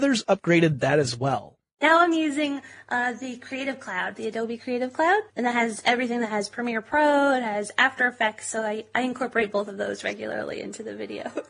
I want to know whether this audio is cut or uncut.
cut